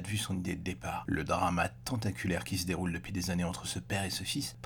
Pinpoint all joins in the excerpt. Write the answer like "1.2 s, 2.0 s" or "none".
none